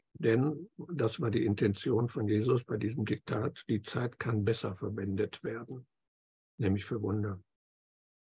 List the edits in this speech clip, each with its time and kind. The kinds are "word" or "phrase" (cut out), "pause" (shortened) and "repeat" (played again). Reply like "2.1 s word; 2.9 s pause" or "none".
none